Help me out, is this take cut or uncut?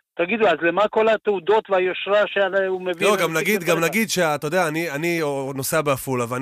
uncut